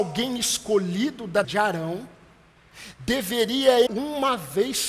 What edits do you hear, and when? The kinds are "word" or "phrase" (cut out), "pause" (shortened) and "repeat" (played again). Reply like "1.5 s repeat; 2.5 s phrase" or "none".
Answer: 1.4 s word; 3.9 s word